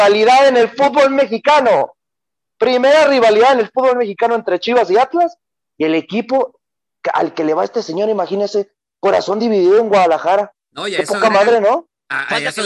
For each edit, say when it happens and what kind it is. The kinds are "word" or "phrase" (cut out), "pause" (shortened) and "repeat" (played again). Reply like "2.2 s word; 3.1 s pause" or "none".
none

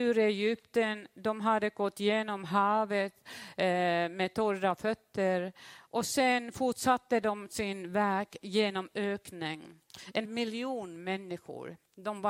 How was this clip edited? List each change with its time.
10.2 s word

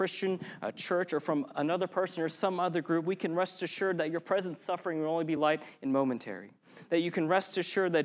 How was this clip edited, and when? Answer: none

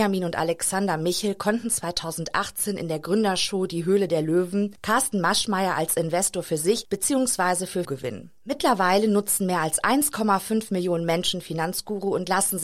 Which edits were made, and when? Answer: 7.8 s word

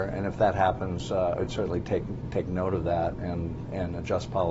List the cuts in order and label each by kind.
none

